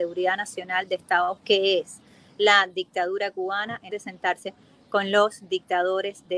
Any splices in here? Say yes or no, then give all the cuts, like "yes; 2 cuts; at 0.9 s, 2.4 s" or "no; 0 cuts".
yes; 2 cuts; at 1.4 s, 3.9 s